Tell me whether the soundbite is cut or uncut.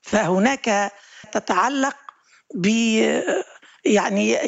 cut